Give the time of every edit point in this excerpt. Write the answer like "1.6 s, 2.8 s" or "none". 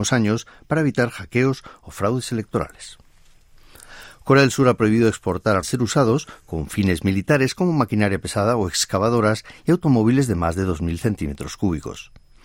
5.6 s